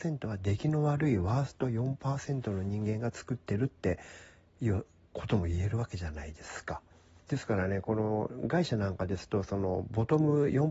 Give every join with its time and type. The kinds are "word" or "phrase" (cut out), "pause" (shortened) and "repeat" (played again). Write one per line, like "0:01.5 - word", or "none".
0:06.9 - pause